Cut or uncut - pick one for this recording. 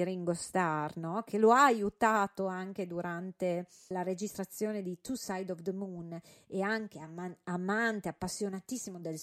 cut